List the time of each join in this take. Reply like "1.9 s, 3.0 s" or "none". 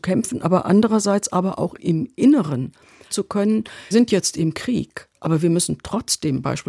1.8 s, 3.1 s, 3.9 s